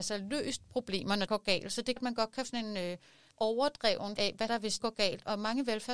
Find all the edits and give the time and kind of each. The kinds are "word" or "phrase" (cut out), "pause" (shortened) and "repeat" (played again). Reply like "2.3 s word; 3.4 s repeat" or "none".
1.3 s word; 2.0 s word; 2.4 s word; 3.3 s word; 4.2 s word; 4.5 s word; 4.8 s word